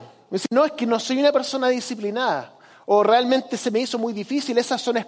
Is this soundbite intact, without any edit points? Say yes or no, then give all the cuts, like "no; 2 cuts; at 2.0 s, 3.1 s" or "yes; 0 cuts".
yes; 0 cuts